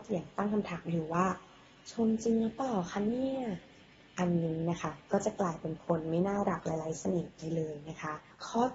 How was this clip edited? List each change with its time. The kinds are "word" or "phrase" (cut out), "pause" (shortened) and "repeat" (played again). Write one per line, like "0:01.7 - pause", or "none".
none